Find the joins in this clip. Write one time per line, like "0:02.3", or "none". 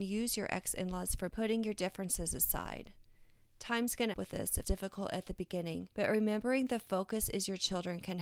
0:01.3
0:04.1
0:04.6
0:05.9